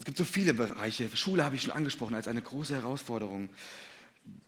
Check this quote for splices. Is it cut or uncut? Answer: uncut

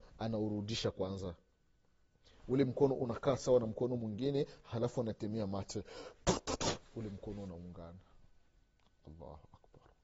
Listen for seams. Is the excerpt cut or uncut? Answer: cut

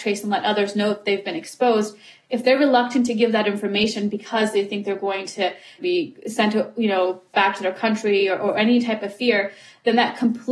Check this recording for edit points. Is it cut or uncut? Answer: uncut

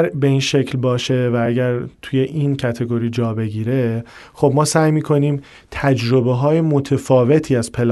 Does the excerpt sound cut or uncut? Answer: uncut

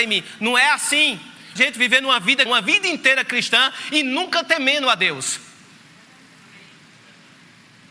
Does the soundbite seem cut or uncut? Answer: cut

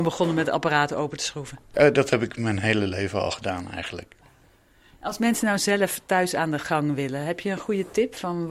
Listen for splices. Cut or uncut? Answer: uncut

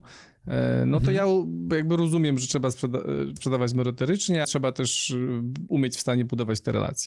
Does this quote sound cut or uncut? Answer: cut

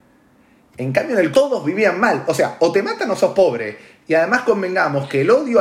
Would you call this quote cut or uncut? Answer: cut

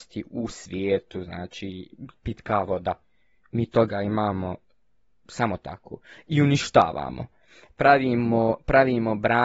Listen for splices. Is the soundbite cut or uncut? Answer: uncut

